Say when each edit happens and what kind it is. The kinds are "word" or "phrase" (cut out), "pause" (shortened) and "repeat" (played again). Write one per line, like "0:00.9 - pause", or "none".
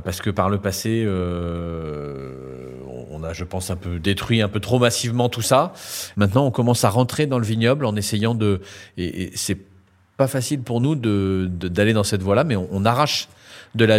none

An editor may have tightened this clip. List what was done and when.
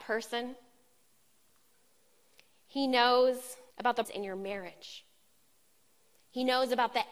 0:03.7 - pause
0:04.0 - word

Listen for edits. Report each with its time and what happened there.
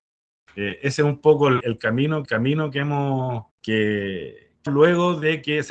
0:01.6 - word
0:02.3 - repeat
0:03.5 - pause
0:04.7 - phrase

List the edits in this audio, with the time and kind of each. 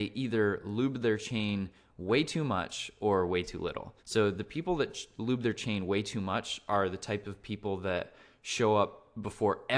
0:04.0 - pause

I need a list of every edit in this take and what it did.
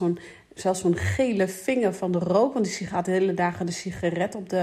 none

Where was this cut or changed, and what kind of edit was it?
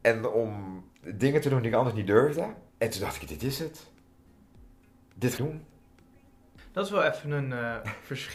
0:00.9 - pause
0:02.7 - pause
0:05.4 - phrase

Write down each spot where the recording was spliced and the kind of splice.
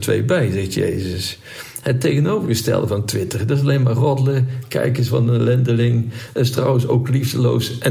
none

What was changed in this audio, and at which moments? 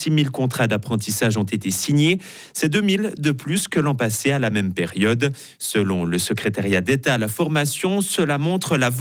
none

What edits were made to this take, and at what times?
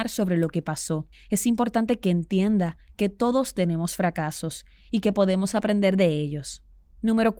none

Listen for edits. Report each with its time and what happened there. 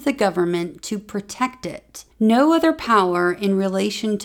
0:02.1 - pause

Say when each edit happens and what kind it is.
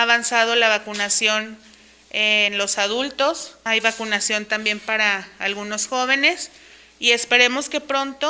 0:03.7 - word

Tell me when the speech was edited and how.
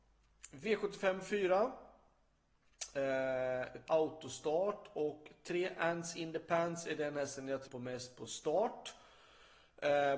0:03.9 - word
0:07.6 - word

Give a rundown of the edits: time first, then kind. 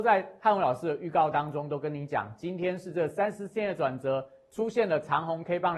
none

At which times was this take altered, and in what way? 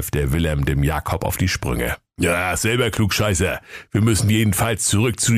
none

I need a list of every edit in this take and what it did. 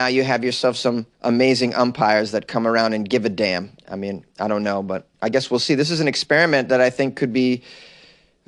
0:01.1 - pause
0:03.8 - pause
0:05.1 - pause

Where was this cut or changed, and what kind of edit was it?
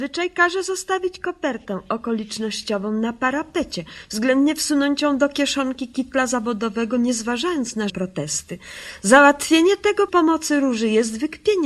0:07.9 - word
0:10.1 - word

